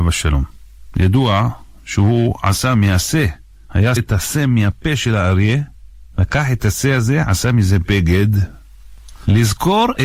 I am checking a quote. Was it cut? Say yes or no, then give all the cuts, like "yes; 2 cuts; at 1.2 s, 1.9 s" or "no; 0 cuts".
yes; 1 cut; at 4.0 s